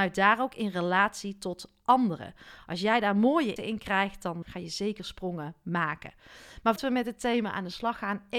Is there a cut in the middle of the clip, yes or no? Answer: yes